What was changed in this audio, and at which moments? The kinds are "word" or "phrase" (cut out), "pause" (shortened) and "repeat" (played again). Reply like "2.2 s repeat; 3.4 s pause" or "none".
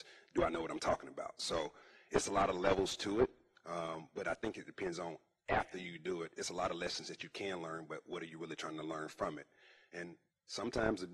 none